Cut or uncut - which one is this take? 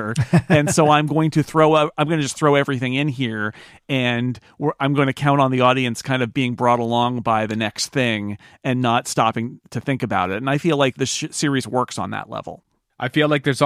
cut